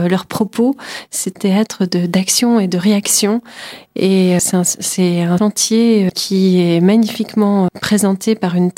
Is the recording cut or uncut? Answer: cut